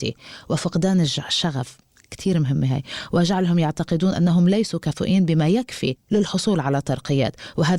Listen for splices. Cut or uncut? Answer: uncut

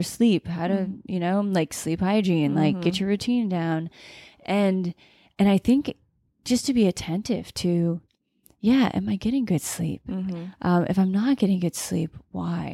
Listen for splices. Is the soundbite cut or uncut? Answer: uncut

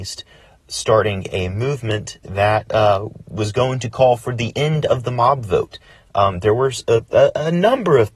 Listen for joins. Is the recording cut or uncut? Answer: uncut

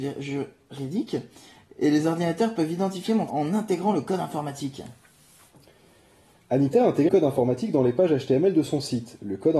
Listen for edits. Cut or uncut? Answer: cut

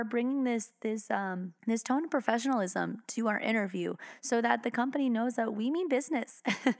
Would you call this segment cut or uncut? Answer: cut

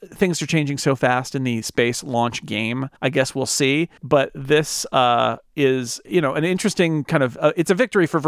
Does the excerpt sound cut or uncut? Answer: cut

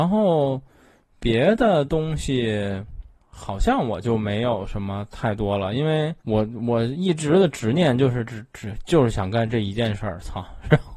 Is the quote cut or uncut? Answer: cut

